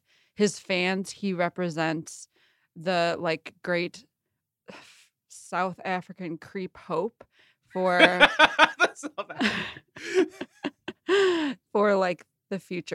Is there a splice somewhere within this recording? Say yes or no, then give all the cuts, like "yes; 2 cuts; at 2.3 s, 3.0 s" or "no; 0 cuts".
no; 0 cuts